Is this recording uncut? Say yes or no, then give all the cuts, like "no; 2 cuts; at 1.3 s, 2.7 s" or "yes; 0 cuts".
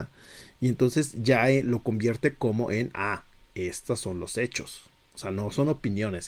yes; 0 cuts